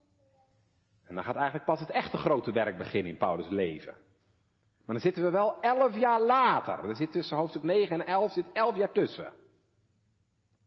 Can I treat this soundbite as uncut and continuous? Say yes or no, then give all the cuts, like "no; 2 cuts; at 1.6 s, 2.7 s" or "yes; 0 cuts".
yes; 0 cuts